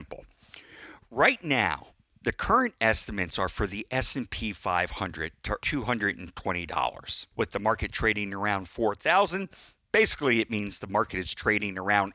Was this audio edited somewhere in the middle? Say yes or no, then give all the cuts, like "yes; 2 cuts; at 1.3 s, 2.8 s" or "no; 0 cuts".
yes; 3 cuts; at 2.1 s, 5.6 s, 7.3 s